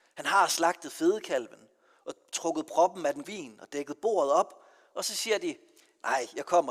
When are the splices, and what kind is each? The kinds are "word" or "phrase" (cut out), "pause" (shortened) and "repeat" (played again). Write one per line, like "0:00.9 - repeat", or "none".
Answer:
0:03.2 - word